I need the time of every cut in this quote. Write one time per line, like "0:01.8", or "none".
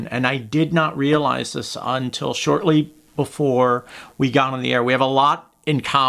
none